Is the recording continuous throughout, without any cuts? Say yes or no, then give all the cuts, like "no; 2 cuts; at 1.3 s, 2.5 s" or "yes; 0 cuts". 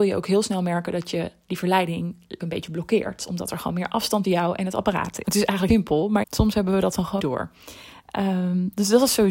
no; 6 cuts; at 2.4 s, 4.2 s, 5.2 s, 5.7 s, 6.2 s, 7.2 s